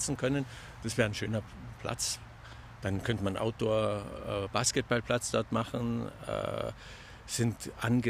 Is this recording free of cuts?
yes; 0 cuts

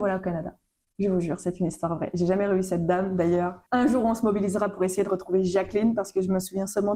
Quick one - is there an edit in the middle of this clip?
yes; 1 cut; at 3.7 s

